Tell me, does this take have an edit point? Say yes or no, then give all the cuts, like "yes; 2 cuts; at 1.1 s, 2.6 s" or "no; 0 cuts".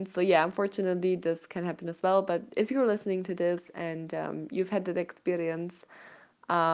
no; 0 cuts